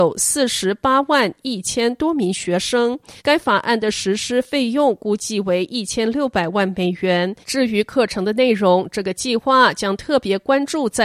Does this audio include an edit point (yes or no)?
yes